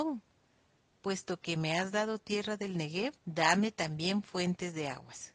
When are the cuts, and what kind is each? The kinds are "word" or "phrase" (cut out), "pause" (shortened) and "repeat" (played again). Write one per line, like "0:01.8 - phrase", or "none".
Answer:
0:03.2 - pause